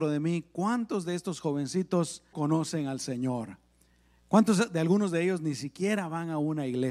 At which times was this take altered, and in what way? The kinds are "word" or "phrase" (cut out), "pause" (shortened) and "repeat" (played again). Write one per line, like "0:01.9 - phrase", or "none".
0:02.3 - word